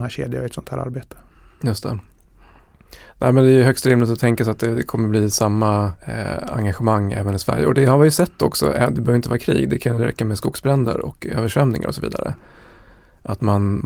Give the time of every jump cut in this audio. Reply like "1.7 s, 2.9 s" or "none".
6.0 s